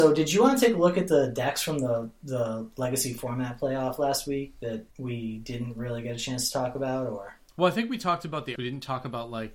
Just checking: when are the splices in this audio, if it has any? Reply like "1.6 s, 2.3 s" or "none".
4.9 s, 8.6 s